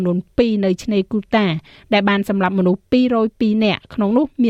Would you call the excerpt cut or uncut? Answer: uncut